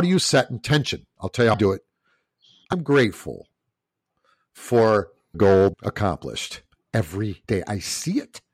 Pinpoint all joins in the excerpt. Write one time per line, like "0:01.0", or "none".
0:01.5
0:02.7
0:05.3
0:05.7
0:07.4